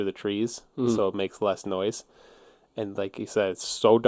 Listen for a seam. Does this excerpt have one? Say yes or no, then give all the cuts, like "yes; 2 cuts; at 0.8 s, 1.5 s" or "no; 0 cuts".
no; 0 cuts